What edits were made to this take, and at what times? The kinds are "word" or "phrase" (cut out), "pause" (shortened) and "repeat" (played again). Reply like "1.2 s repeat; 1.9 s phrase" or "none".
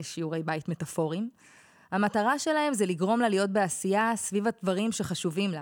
none